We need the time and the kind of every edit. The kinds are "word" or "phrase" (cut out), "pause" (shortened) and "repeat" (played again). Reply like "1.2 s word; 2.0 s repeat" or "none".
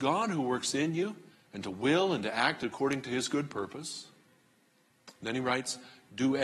1.3 s pause

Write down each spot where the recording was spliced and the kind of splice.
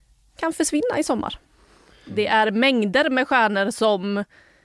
none

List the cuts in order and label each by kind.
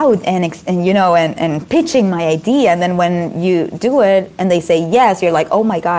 none

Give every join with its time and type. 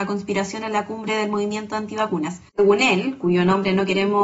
2.5 s pause

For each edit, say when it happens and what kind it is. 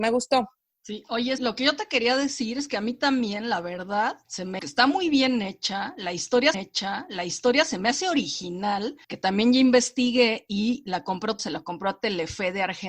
1.4 s word; 4.2 s pause; 4.6 s word; 6.5 s repeat; 9.0 s pause; 11.4 s word

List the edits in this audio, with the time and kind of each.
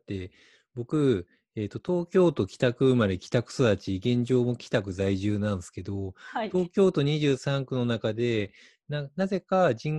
none

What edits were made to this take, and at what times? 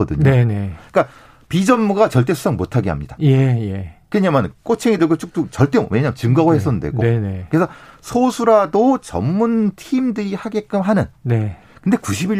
none

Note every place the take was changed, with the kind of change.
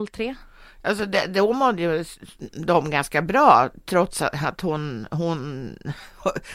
none

